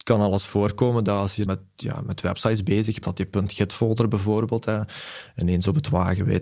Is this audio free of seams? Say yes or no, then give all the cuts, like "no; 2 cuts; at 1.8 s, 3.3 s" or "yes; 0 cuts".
no; 2 cuts; at 1.5 s, 3.0 s